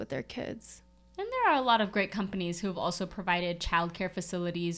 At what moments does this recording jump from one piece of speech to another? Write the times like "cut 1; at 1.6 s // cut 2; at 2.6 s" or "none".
none